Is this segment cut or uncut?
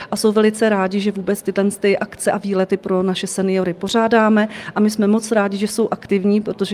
uncut